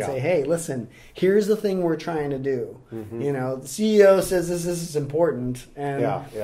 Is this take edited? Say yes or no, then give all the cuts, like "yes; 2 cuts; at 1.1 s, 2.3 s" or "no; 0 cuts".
yes; 1 cut; at 4.6 s